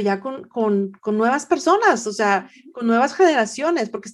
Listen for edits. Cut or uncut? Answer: uncut